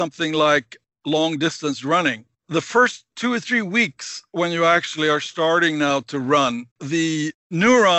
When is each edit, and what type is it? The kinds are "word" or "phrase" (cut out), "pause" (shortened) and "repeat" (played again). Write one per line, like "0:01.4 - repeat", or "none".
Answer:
0:06.7 - pause